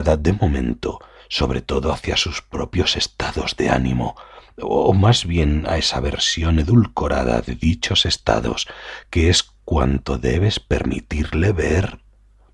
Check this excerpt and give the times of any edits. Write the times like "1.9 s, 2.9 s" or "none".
none